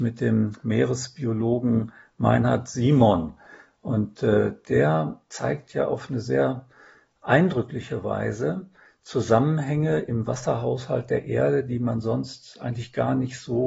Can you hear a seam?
no; 0 cuts

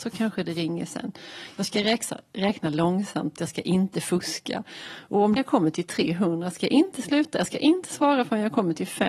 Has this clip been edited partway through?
yes; 1 cut; at 5.4 s

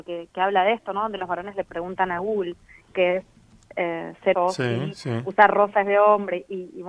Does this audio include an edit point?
yes; 1 cut; at 4.3 s

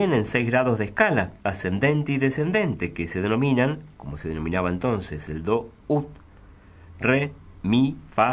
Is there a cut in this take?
yes; 1 cut; at 1.4 s

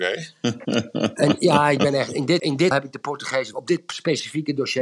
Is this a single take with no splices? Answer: no; 3 cuts; at 2.4 s, 2.7 s, 3.5 s

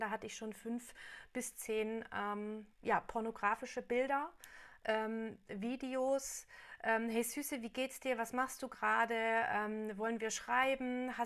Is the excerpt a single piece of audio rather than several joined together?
no; 1 cut; at 2.7 s

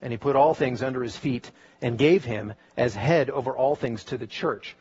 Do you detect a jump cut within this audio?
no; 0 cuts

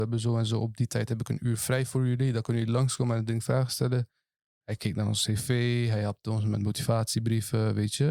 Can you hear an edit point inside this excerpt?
no; 0 cuts

